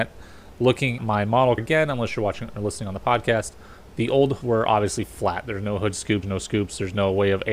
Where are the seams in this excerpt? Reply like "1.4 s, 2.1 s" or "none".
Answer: 1.0 s, 1.6 s, 4.4 s, 6.2 s